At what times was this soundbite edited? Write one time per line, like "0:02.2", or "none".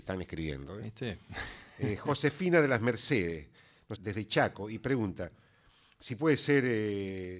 0:04.0